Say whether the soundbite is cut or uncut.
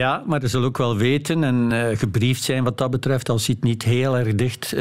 uncut